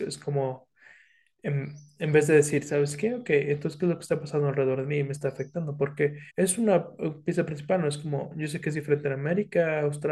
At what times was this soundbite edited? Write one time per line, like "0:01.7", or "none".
0:06.3